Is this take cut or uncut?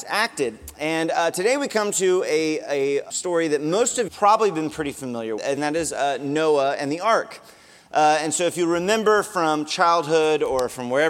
cut